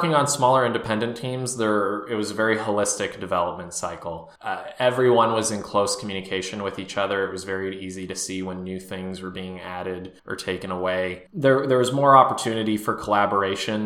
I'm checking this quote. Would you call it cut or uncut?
cut